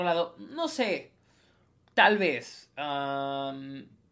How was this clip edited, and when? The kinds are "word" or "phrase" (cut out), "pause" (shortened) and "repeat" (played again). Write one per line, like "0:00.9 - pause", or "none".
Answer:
none